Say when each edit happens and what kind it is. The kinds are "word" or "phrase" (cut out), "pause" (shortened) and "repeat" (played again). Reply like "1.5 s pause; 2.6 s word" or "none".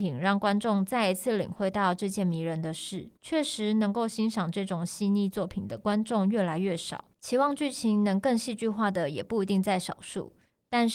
3.2 s pause; 7.1 s pause